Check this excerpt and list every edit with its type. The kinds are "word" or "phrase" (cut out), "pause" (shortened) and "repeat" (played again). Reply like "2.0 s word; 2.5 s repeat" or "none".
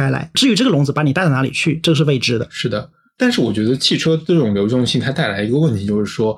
none